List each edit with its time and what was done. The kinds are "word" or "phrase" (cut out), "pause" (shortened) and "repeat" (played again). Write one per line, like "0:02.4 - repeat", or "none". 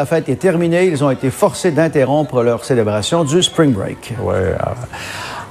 none